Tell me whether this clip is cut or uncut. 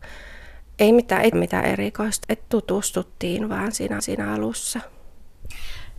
cut